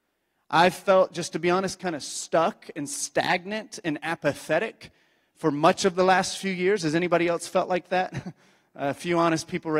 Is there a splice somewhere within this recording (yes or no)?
no